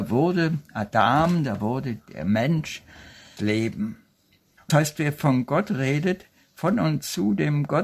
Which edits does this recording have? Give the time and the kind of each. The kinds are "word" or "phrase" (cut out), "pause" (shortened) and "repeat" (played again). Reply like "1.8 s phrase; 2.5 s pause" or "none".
3.4 s word; 4.7 s word

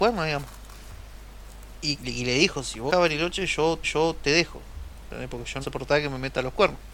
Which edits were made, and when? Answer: 2.0 s word; 2.9 s word; 3.8 s repeat; 5.6 s phrase

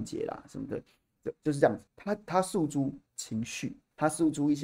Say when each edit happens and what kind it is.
1.9 s pause; 3.1 s pause

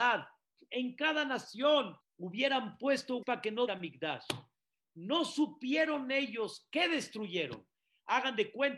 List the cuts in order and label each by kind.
2.0 s pause; 3.2 s word; 3.7 s phrase

